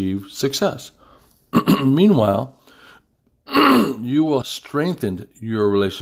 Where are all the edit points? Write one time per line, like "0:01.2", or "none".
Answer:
0:04.4